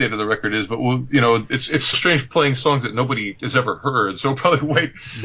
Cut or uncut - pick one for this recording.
cut